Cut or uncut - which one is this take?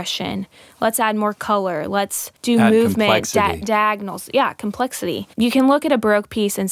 cut